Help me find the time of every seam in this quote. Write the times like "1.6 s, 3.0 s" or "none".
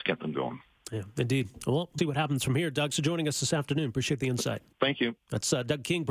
2.0 s, 2.9 s, 4.7 s